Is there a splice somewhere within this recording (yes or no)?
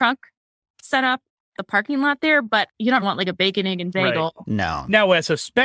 yes